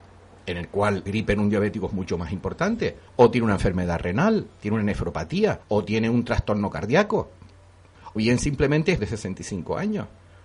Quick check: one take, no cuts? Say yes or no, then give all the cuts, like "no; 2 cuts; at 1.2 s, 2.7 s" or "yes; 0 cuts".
no; 5 cuts; at 1.1 s, 3.1 s, 5.6 s, 8.2 s, 9.0 s